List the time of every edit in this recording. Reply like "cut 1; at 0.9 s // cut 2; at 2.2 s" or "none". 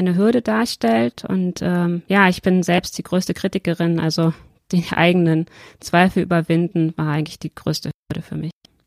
none

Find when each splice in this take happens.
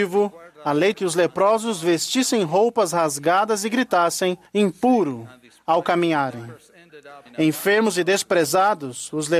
cut 1; at 0.9 s // cut 2; at 4.5 s // cut 3; at 7.3 s

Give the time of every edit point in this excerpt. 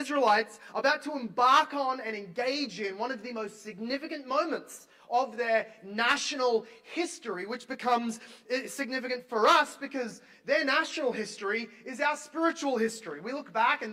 none

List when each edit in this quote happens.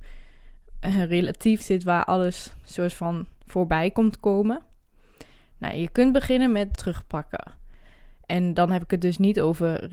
cut 1; at 1.6 s // cut 2; at 6.7 s

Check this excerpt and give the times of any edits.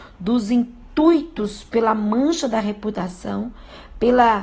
none

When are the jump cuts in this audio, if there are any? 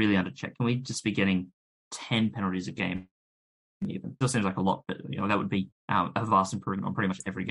cut 1; at 4.2 s

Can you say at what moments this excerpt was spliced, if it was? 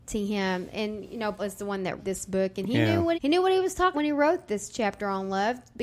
cut 1; at 1.4 s // cut 2; at 2.0 s // cut 3; at 3.1 s // cut 4; at 3.9 s

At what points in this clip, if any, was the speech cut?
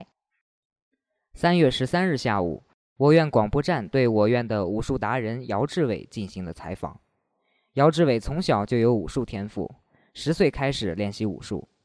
none

